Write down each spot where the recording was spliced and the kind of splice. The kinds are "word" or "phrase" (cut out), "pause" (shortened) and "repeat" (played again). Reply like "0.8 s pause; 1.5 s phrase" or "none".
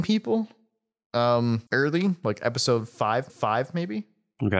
1.7 s pause; 3.3 s repeat